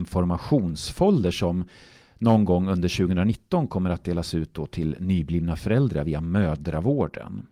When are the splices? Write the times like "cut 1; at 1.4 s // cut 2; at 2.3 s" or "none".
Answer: none